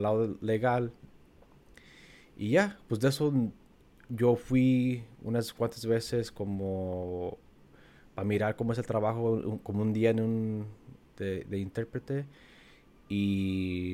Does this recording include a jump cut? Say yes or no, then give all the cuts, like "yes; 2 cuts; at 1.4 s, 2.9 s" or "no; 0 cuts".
no; 0 cuts